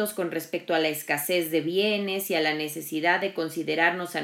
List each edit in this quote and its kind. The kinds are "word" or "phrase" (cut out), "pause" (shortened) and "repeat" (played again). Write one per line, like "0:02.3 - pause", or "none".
none